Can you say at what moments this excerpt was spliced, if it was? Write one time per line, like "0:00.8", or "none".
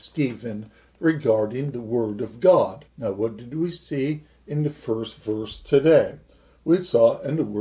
0:02.9